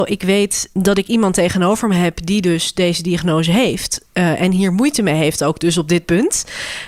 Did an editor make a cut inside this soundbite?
no; 0 cuts

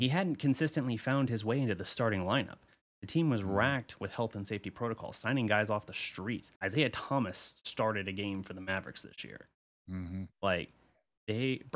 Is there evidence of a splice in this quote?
yes; 1 cut; at 6.6 s

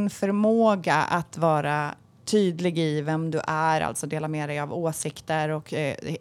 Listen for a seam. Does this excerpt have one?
no; 0 cuts

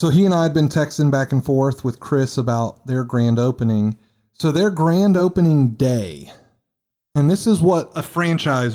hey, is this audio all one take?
yes; 0 cuts

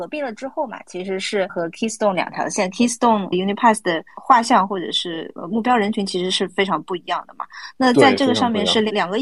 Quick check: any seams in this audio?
yes; 2 cuts; at 1.5 s, 3.3 s

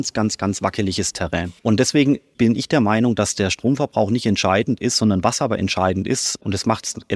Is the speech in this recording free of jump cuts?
no; 1 cut; at 1.6 s

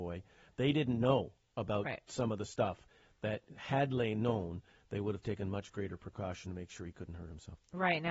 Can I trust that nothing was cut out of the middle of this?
yes; 0 cuts

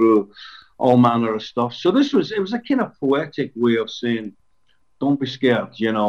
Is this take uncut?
yes; 0 cuts

